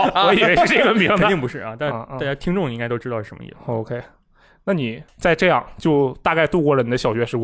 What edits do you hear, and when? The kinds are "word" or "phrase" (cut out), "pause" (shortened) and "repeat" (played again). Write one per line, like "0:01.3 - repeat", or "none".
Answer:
0:05.1 - pause